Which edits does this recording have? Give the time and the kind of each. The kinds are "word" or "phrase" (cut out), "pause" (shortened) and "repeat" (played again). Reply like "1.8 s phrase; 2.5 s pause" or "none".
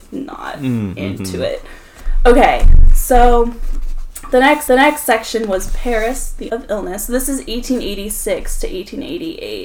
4.7 s repeat; 6.5 s word